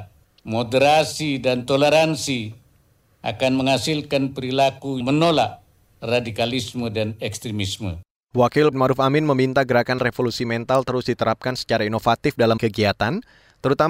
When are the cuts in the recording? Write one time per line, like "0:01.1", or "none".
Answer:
0:05.0
0:08.7
0:10.0
0:12.6